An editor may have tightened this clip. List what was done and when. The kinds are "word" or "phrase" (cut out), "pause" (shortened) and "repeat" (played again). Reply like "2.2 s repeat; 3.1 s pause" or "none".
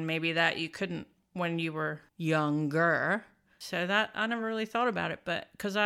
none